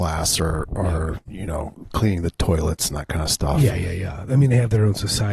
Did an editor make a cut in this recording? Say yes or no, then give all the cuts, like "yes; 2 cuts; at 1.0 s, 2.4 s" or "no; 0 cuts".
no; 0 cuts